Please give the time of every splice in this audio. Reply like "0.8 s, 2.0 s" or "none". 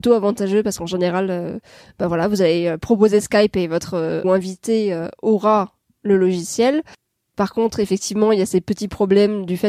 4.2 s